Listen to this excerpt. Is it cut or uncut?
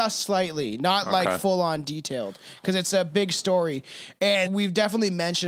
cut